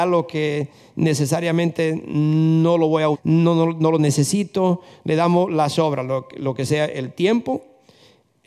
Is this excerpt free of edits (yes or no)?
no